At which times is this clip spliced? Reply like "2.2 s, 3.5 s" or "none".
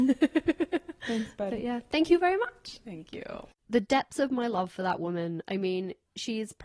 none